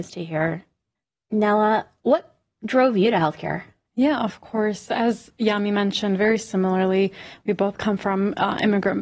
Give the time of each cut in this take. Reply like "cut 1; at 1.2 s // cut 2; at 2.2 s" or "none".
none